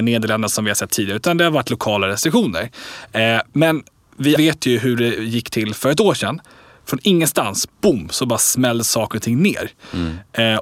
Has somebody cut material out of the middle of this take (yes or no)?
yes